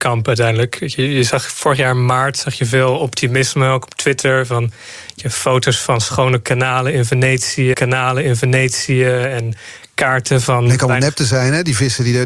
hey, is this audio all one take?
no; 1 cut; at 7.7 s

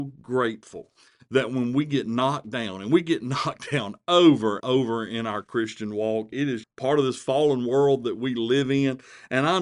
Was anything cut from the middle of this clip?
yes; 2 cuts; at 4.6 s, 6.6 s

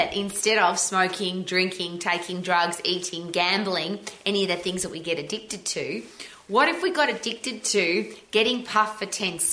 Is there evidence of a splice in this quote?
no; 0 cuts

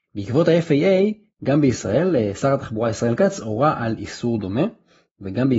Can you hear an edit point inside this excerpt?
no; 0 cuts

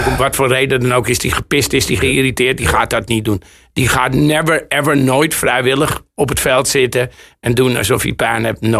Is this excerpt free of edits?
yes; 0 cuts

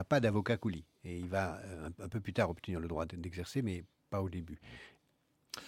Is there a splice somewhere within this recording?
no; 0 cuts

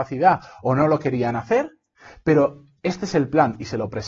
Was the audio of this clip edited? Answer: no; 0 cuts

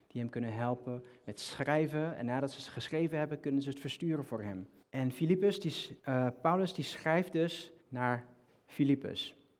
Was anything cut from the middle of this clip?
yes; 3 cuts; at 4.8 s, 6.0 s, 7.8 s

